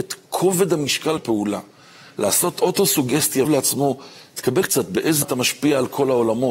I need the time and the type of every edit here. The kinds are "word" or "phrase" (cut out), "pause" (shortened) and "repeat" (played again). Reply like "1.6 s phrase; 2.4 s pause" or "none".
1.2 s word; 3.4 s word; 4.6 s word; 5.2 s word